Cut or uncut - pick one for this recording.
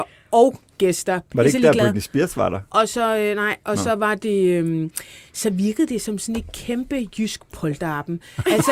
uncut